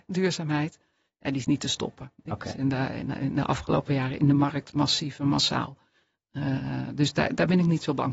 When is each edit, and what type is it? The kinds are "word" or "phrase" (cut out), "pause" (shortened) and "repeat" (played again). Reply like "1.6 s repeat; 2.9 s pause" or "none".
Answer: none